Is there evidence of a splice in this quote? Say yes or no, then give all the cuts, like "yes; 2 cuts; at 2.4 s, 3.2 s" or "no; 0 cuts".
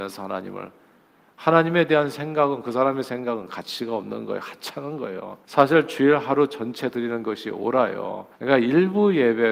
yes; 2 cuts; at 5.4 s, 8.3 s